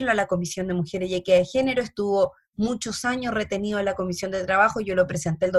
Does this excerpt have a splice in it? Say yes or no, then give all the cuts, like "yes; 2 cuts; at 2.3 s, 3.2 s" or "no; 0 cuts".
no; 0 cuts